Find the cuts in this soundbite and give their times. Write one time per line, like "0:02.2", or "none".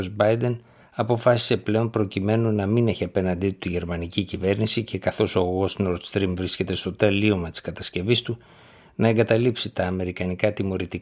none